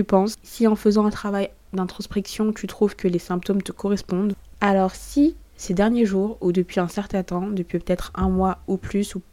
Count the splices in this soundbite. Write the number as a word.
zero